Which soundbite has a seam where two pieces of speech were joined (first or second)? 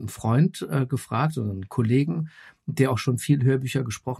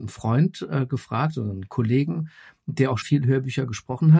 second